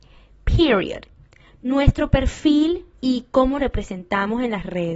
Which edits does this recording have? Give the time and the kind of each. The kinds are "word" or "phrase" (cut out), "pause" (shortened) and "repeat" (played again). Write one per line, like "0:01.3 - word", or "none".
0:02.9 - pause
0:03.6 - word